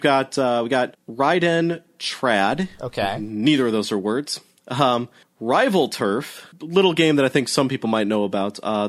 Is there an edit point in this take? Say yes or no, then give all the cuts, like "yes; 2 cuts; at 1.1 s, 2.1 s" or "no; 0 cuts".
yes; 1 cut; at 5.2 s